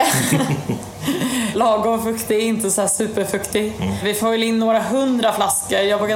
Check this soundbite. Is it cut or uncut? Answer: uncut